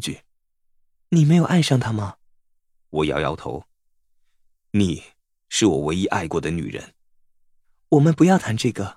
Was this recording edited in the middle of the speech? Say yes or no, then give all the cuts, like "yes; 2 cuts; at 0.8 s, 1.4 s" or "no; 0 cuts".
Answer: no; 0 cuts